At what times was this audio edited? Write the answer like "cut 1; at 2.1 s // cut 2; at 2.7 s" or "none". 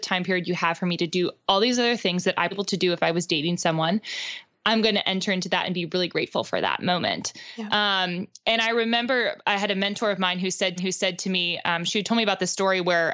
cut 1; at 2.5 s // cut 2; at 10.8 s